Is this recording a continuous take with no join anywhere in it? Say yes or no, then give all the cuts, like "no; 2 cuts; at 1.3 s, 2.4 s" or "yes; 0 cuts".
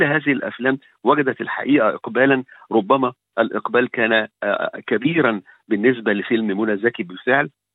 yes; 0 cuts